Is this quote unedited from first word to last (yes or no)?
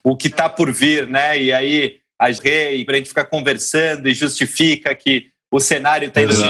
no